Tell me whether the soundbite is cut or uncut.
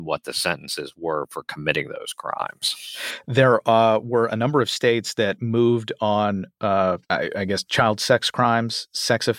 cut